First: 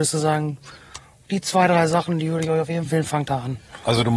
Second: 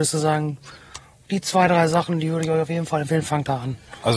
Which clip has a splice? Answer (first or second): first